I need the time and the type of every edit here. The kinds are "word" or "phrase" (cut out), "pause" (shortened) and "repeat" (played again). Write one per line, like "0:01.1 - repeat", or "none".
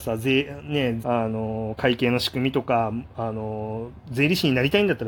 0:01.0 - phrase